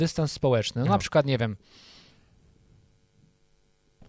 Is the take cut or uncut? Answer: uncut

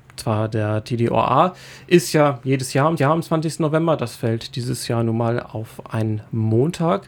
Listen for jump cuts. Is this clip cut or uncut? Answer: cut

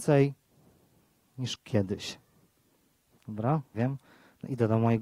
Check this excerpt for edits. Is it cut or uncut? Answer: cut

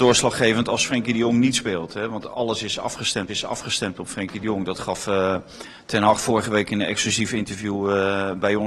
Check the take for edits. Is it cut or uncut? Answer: cut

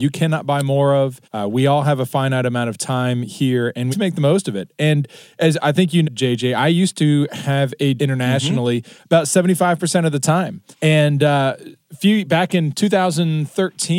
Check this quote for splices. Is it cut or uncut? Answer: cut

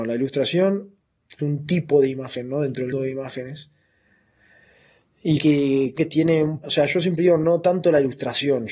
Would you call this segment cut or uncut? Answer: cut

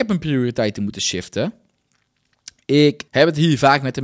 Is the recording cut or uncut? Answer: cut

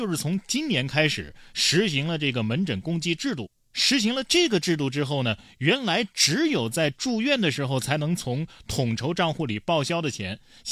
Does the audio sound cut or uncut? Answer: uncut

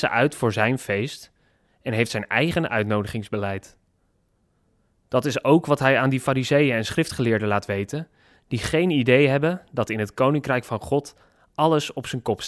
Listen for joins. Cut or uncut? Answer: uncut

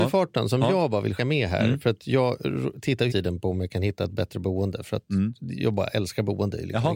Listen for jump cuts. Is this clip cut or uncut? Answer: cut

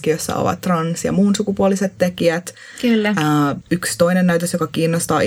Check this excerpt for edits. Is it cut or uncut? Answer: cut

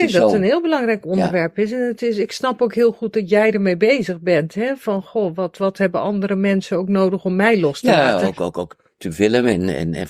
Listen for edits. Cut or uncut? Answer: uncut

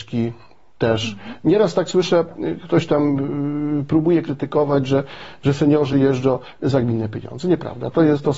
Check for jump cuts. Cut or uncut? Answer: uncut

